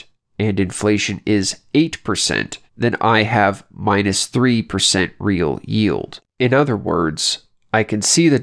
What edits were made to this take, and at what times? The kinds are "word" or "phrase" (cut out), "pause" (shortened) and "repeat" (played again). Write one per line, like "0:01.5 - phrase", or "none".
0:02.7 - pause
0:06.3 - pause